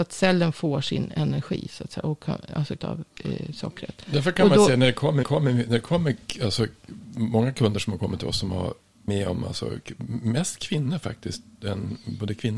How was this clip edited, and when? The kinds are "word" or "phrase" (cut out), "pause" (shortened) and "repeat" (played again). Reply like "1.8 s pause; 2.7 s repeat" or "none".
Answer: 2.8 s phrase; 3.1 s pause; 5.2 s repeat; 9.1 s word